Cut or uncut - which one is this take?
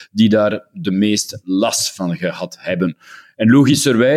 uncut